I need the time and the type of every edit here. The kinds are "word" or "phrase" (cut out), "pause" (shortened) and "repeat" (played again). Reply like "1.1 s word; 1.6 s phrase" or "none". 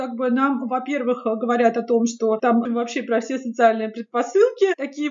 2.7 s word